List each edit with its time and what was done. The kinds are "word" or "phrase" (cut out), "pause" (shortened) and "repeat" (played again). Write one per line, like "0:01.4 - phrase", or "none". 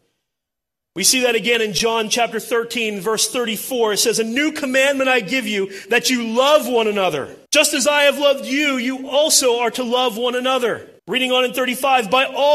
0:07.5 - pause
0:11.0 - pause